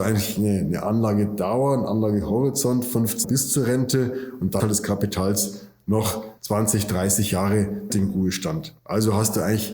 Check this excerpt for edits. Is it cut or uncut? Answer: cut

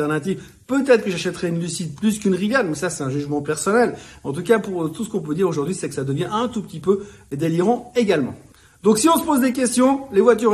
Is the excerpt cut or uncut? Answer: uncut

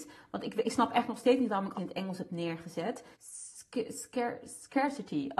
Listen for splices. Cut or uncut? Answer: cut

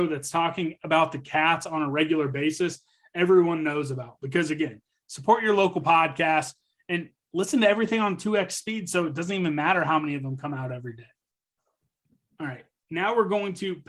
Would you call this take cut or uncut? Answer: uncut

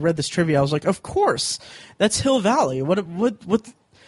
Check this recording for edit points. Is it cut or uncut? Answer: uncut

